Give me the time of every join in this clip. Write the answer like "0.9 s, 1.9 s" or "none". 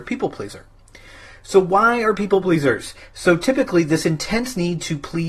2.4 s